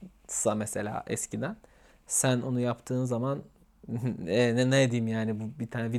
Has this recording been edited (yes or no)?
no